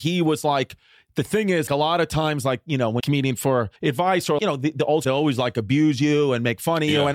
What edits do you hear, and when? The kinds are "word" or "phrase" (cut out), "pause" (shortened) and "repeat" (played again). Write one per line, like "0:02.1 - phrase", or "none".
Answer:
0:01.7 - word
0:03.0 - phrase
0:03.8 - pause
0:04.4 - word
0:05.0 - phrase